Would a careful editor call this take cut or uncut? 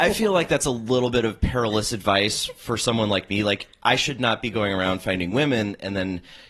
uncut